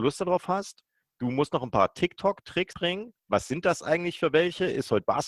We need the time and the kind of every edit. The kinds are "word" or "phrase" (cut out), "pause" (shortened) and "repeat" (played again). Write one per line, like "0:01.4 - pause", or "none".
0:02.7 - phrase